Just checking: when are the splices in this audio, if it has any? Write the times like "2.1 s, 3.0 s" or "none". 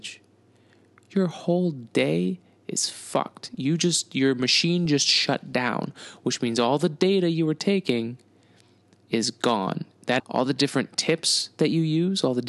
10.2 s